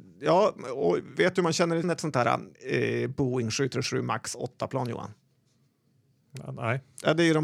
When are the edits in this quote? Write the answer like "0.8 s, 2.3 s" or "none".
1.8 s, 2.6 s

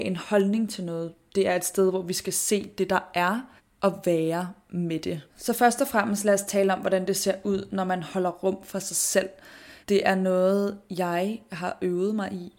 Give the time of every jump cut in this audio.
3.6 s, 5.3 s, 9.8 s

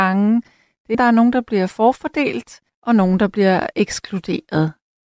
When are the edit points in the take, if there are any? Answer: 0.9 s, 2.7 s, 3.7 s

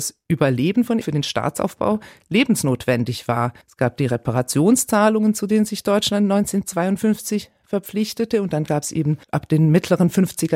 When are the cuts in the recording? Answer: 1.0 s, 3.6 s, 9.2 s

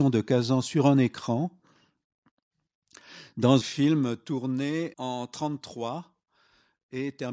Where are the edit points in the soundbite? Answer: 3.6 s, 4.9 s

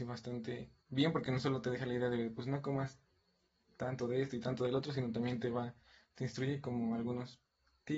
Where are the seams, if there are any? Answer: none

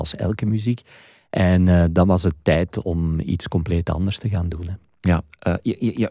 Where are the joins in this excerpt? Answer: none

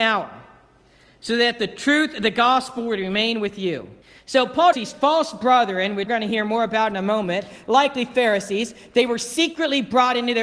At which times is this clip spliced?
4.0 s, 4.7 s, 6.1 s

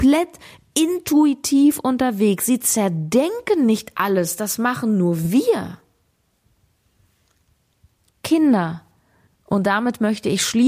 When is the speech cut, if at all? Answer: none

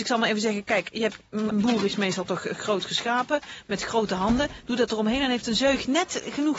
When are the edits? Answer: 1.5 s

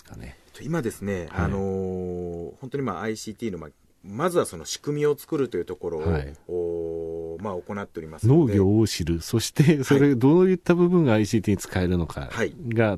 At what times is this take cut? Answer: none

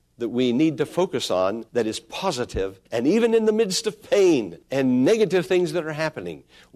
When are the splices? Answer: 1.7 s, 2.9 s, 4.6 s

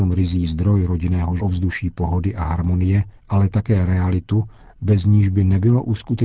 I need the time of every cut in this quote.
1.4 s, 3.2 s

